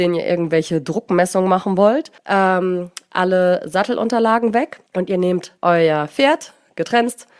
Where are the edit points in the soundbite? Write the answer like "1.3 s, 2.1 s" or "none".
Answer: 2.2 s, 4.9 s, 5.6 s